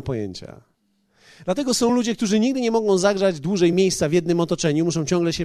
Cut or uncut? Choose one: uncut